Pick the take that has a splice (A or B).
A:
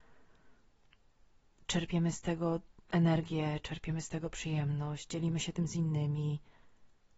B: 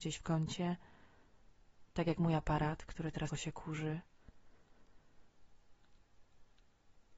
B